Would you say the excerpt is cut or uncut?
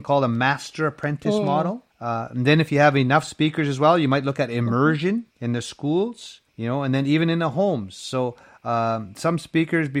cut